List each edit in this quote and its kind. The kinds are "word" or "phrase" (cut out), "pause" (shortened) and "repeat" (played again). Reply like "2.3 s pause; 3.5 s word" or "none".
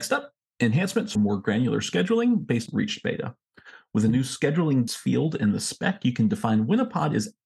1.1 s word; 2.7 s phrase; 4.9 s word